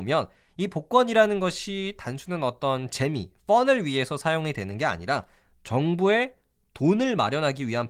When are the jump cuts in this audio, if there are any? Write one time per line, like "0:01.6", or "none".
none